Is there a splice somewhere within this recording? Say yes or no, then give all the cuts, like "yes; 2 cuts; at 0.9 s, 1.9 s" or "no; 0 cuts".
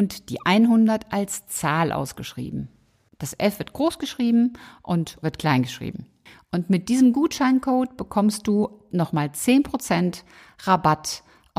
yes; 1 cut; at 5.2 s